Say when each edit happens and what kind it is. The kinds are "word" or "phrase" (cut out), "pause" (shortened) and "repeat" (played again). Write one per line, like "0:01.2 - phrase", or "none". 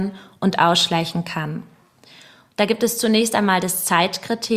none